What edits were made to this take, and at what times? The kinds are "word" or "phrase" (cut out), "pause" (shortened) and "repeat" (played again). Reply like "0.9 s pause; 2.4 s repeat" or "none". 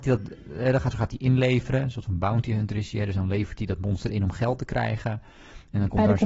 0.9 s phrase